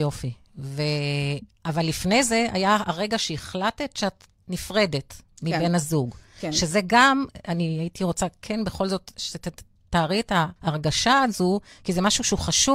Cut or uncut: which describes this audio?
cut